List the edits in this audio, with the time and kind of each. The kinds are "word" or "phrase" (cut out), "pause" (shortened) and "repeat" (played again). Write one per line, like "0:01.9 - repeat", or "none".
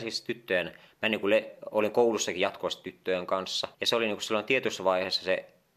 0:03.7 - pause

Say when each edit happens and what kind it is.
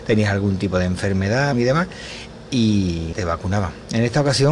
0:01.5 - word
0:03.1 - word

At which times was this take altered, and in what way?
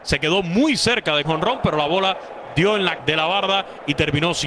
0:01.2 - phrase
0:03.0 - word

